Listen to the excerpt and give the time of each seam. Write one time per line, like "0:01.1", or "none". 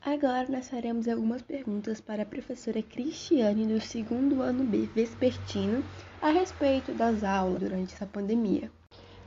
0:07.6